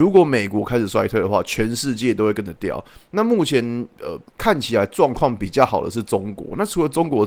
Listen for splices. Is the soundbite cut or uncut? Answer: cut